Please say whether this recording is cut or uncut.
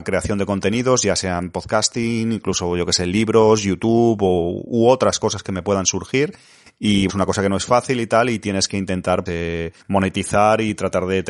cut